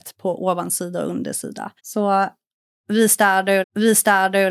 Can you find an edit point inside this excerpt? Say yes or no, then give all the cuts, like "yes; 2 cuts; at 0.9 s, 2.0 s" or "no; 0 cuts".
yes; 2 cuts; at 1.8 s, 3.6 s